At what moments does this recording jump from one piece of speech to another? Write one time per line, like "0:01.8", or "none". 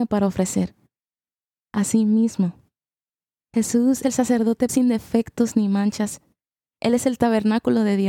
0:04.0
0:04.7